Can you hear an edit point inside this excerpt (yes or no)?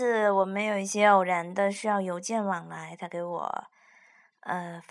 no